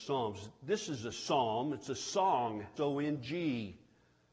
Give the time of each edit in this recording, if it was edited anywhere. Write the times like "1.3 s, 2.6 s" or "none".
2.8 s